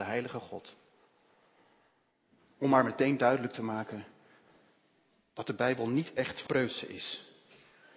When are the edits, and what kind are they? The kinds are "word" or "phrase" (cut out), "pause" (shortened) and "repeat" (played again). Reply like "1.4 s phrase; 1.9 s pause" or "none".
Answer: 6.5 s word